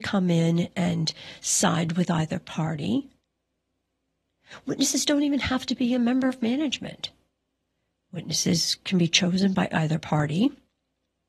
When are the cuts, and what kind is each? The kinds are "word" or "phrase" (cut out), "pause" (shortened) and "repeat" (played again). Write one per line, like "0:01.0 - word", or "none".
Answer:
0:07.5 - pause